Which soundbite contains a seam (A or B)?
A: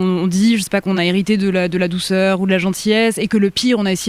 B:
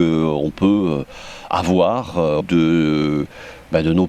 B